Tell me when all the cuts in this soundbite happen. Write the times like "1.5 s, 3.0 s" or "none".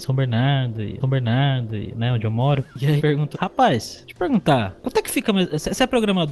1.0 s, 3.0 s, 3.3 s